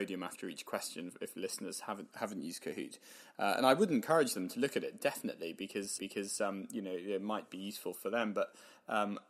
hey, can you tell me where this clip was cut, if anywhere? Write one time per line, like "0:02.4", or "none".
0:06.0